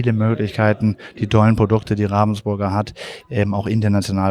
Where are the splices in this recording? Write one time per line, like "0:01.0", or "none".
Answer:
none